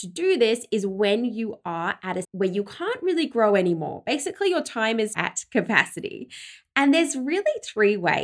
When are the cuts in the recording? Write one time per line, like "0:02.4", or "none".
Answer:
0:02.2
0:05.1